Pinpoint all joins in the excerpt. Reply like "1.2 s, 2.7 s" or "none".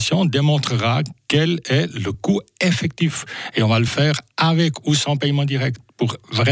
none